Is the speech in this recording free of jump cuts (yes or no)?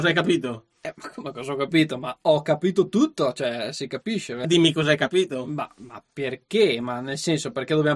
no